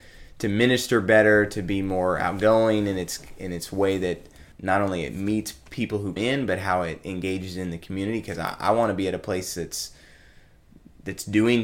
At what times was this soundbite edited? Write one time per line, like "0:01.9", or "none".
0:04.5
0:06.2